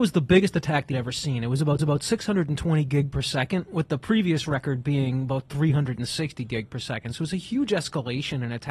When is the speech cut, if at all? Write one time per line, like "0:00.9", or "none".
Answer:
0:00.9
0:01.8